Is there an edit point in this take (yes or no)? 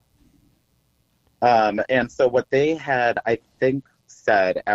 no